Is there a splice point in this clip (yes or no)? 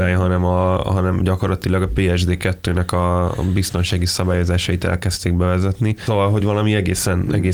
no